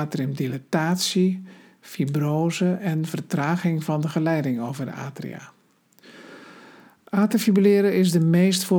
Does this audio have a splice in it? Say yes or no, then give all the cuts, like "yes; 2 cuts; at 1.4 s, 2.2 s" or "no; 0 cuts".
no; 0 cuts